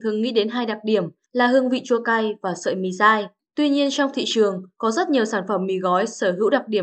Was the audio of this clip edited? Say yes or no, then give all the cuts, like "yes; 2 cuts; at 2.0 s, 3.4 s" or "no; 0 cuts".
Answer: no; 0 cuts